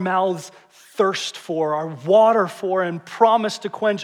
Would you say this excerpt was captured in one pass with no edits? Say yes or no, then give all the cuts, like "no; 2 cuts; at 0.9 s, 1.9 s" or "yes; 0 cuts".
yes; 0 cuts